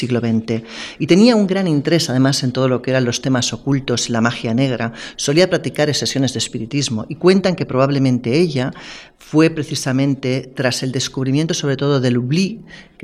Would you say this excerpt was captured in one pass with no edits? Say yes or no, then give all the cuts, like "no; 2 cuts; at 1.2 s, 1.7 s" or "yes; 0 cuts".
yes; 0 cuts